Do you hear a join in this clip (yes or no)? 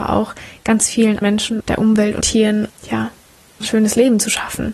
yes